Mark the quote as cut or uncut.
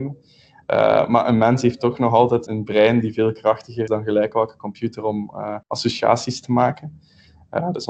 cut